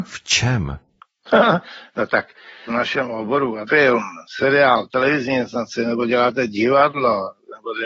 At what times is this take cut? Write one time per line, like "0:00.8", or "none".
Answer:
0:02.7
0:03.7
0:04.3